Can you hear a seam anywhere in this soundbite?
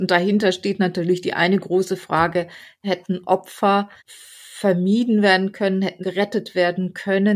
yes; 2 cuts; at 4.0 s, 6.0 s

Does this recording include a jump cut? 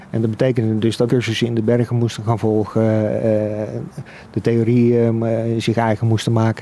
yes; 1 cut; at 1.1 s

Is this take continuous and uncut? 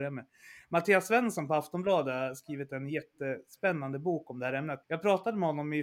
no; 1 cut; at 4.8 s

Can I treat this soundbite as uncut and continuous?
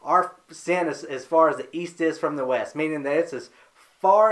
yes; 0 cuts

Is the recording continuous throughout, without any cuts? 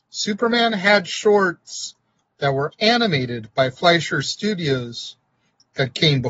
yes; 0 cuts

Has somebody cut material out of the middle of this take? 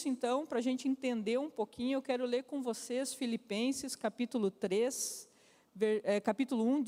no; 0 cuts

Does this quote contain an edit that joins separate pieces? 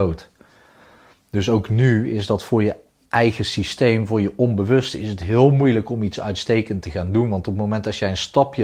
no; 0 cuts

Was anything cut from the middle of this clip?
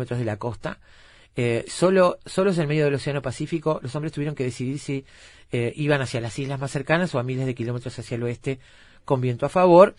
no; 0 cuts

